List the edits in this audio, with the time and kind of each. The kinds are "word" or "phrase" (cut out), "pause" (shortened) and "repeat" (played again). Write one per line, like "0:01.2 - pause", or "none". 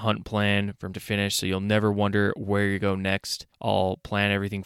0:00.9 - word
0:02.8 - word